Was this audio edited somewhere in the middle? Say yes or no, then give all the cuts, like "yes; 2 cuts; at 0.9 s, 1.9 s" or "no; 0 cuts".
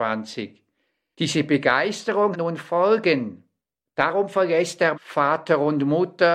yes; 2 cuts; at 2.3 s, 4.9 s